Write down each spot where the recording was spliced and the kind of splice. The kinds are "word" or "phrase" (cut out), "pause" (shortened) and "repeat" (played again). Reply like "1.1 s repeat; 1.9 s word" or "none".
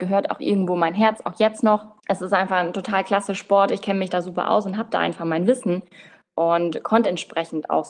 2.0 s pause